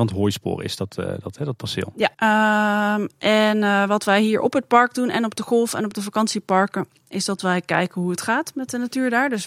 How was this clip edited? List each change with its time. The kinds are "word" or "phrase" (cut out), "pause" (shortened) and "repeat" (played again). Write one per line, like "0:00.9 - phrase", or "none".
0:02.1 - pause